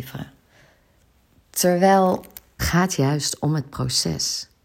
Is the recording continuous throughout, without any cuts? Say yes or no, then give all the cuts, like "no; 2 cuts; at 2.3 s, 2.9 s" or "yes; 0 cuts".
no; 1 cut; at 2.6 s